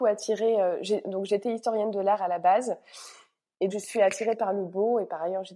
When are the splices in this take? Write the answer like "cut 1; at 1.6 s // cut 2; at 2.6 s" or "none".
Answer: cut 1; at 3.7 s